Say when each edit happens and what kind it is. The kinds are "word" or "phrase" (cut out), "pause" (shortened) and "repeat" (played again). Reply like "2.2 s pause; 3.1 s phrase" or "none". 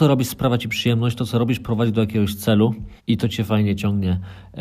3.0 s pause